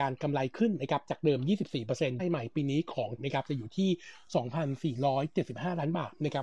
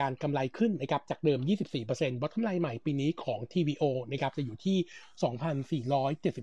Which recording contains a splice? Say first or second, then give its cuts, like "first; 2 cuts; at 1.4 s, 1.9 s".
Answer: first; 2 cuts; at 2.2 s, 3.2 s